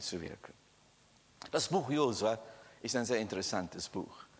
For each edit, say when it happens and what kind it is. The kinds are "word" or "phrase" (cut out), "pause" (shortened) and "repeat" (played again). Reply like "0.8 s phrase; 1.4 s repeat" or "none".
none